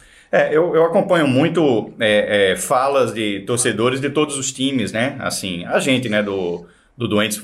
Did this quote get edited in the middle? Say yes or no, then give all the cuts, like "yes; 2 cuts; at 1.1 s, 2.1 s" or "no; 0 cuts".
no; 0 cuts